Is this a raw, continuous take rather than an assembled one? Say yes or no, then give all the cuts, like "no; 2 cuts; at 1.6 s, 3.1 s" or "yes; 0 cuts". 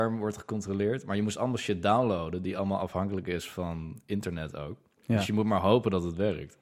yes; 0 cuts